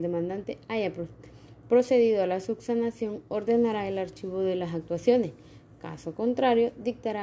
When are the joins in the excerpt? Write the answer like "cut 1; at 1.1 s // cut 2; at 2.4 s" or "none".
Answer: none